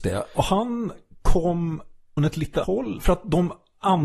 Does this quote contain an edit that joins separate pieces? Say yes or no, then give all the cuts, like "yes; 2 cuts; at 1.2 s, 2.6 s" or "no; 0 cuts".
yes; 2 cuts; at 2.2 s, 2.6 s